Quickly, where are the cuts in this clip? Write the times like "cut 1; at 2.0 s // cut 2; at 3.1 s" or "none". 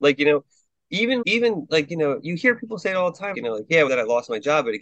cut 1; at 1.2 s // cut 2; at 3.3 s // cut 3; at 3.9 s